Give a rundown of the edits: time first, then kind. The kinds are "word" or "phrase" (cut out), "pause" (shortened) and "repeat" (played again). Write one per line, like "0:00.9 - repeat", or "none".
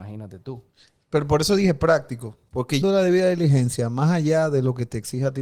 0:02.8 - phrase